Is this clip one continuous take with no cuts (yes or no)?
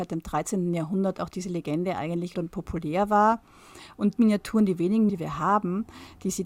no